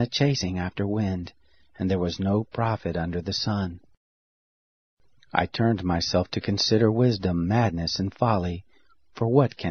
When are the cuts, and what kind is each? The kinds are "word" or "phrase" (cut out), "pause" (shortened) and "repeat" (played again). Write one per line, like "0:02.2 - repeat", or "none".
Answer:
none